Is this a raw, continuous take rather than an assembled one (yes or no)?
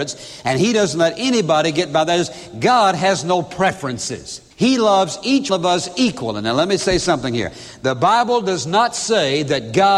no